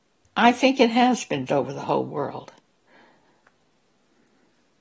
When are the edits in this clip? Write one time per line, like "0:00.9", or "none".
0:01.5